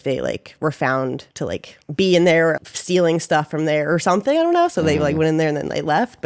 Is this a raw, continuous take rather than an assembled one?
no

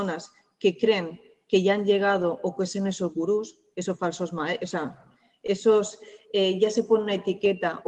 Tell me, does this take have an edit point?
no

